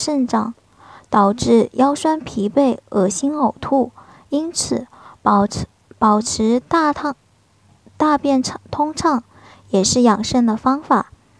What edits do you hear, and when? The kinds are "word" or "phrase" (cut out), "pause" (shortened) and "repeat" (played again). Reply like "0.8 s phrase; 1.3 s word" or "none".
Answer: none

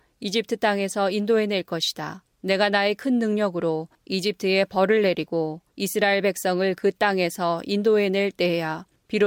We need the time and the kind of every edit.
5.7 s pause

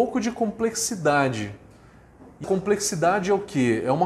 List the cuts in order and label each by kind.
2.4 s word

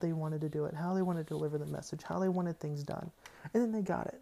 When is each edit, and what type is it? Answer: none

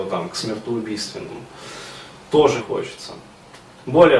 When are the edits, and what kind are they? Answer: 2.6 s word

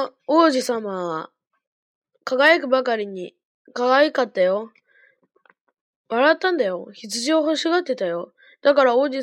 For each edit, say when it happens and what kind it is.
none

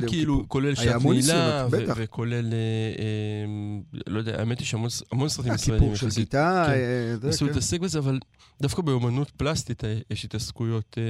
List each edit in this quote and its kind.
8.4 s pause

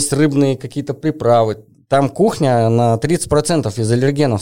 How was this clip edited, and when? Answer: none

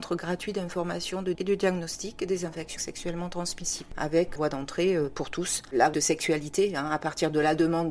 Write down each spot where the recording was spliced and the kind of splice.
1.3 s word; 2.8 s word; 4.4 s word; 5.9 s phrase

